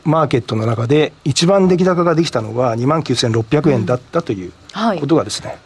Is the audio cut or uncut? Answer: uncut